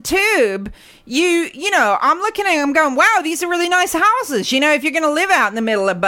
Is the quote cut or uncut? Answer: uncut